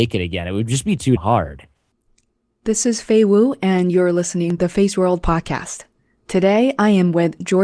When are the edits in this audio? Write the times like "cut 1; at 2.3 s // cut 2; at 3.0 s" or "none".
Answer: cut 1; at 1.2 s // cut 2; at 4.6 s